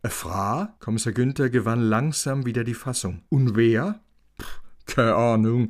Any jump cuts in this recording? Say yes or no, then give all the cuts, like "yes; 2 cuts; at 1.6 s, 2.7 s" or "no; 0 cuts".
no; 0 cuts